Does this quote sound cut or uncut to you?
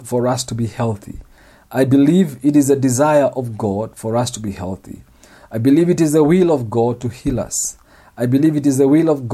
uncut